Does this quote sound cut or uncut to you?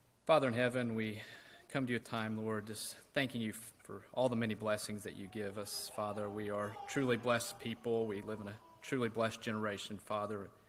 cut